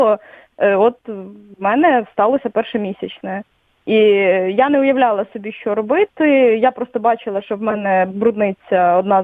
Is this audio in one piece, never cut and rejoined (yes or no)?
yes